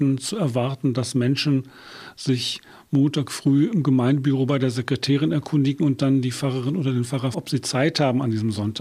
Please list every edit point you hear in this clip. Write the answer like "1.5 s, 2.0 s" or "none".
7.3 s